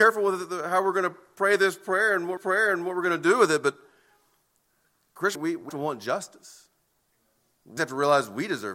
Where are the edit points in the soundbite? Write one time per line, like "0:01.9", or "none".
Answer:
0:02.4
0:05.3
0:05.7
0:07.8